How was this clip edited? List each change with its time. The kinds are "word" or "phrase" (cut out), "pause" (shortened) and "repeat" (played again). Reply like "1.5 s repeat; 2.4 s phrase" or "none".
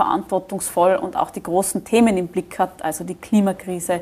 none